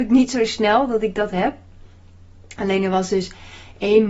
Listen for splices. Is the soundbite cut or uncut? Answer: uncut